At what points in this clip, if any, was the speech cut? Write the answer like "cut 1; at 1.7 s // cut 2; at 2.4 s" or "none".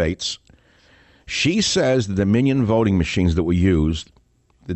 none